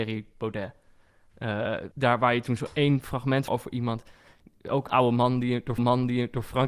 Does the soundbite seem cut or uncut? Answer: cut